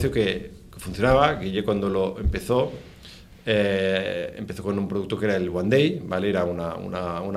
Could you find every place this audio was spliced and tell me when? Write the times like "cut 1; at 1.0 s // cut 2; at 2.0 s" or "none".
none